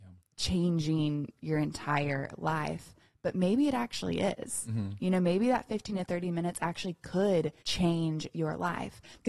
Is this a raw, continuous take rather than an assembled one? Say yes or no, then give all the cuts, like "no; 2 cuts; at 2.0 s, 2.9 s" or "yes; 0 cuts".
no; 1 cut; at 7.6 s